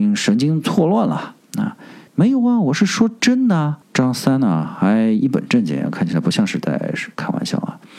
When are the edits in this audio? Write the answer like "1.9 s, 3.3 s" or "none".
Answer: 2.1 s, 3.8 s